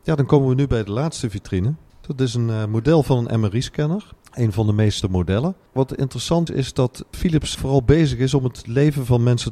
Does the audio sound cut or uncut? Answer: cut